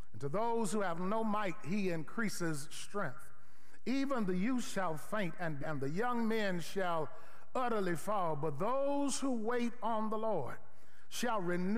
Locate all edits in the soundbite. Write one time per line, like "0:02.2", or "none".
0:05.6